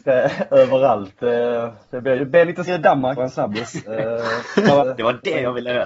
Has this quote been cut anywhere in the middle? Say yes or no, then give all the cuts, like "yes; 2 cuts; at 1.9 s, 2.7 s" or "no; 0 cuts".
yes; 4 cuts; at 2.2 s, 2.7 s, 3.2 s, 4.8 s